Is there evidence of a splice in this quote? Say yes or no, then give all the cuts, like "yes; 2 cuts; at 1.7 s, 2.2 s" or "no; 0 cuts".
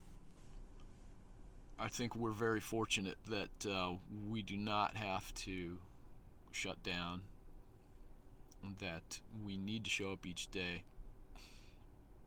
no; 0 cuts